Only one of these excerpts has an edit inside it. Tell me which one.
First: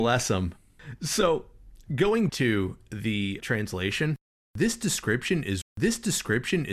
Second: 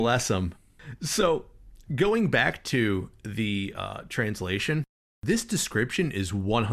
first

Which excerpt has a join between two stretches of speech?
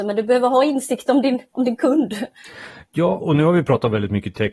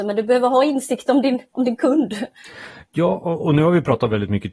first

